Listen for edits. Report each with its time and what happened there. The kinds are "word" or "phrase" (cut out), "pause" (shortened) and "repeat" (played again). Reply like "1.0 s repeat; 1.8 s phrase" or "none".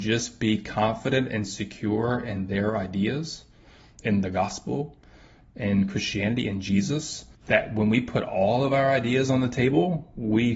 7.3 s pause